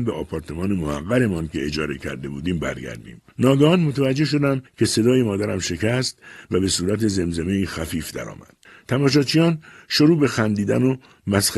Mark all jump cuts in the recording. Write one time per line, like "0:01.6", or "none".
0:03.3
0:04.7
0:08.6